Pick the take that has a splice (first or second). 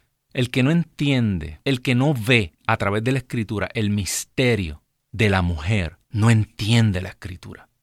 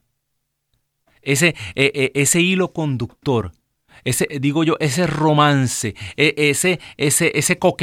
first